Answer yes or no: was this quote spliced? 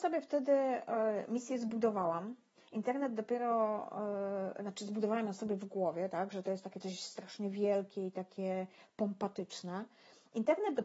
no